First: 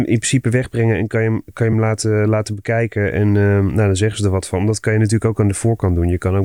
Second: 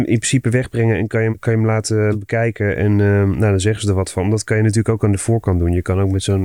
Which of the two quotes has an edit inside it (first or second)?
second